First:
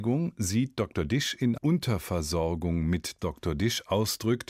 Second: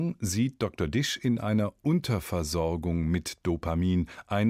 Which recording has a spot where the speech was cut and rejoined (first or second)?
first